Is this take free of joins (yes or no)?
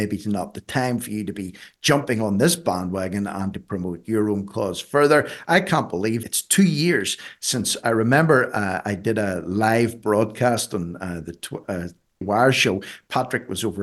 no